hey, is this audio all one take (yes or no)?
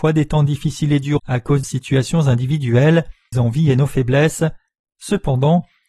no